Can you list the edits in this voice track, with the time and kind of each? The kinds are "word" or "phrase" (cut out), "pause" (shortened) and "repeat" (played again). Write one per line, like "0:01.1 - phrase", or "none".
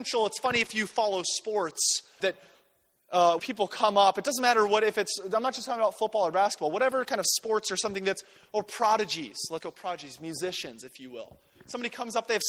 0:02.2 - word
0:03.4 - word
0:09.6 - word